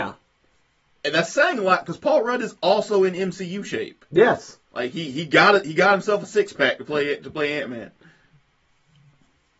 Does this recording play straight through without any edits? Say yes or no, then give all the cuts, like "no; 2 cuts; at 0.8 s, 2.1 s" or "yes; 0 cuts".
no; 1 cut; at 4.6 s